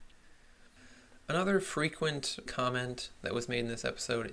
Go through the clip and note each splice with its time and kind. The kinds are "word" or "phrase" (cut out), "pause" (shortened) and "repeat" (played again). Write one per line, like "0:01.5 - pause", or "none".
0:02.5 - word